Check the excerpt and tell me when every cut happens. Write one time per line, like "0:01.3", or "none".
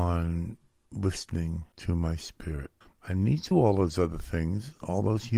0:01.7
0:02.8
0:03.5